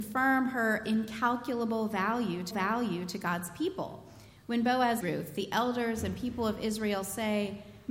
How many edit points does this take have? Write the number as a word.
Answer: two